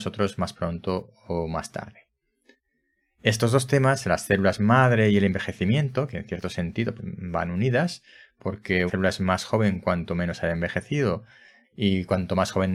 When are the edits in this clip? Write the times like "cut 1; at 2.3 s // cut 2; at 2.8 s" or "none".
cut 1; at 7.0 s // cut 2; at 8.9 s